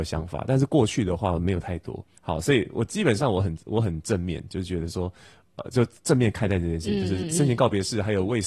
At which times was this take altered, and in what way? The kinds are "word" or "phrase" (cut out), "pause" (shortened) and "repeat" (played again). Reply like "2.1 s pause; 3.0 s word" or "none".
2.2 s pause